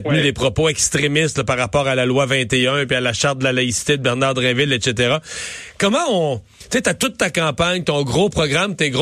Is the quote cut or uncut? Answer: uncut